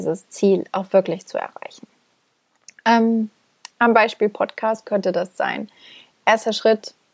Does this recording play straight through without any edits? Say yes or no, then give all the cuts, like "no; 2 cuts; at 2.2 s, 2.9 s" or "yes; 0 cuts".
yes; 0 cuts